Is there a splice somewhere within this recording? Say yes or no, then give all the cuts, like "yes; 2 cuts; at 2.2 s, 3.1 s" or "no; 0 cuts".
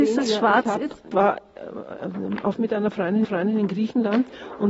yes; 3 cuts; at 1.1 s, 2.5 s, 3.2 s